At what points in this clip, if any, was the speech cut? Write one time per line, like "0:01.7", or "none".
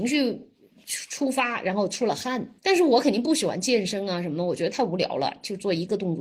0:02.6

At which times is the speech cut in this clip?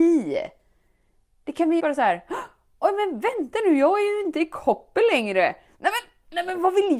0:01.8

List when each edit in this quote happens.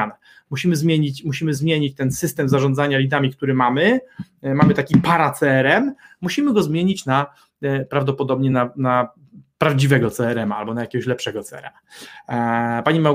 none

